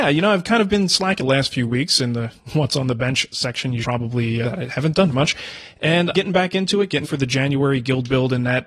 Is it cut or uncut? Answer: cut